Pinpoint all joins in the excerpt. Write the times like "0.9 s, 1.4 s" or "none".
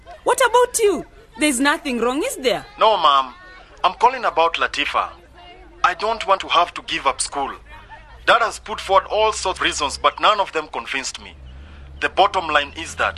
6.4 s, 9.6 s